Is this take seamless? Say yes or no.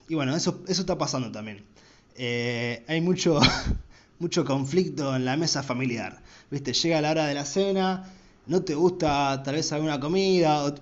yes